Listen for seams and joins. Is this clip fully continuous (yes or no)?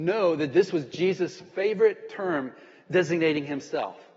yes